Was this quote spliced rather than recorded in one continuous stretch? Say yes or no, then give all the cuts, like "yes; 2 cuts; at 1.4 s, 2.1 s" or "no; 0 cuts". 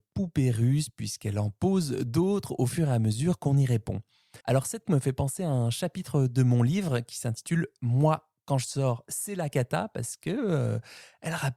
yes; 2 cuts; at 4.4 s, 4.9 s